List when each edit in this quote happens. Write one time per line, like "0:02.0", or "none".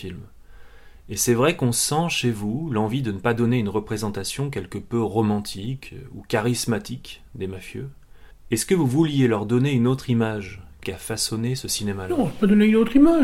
0:08.3
0:10.8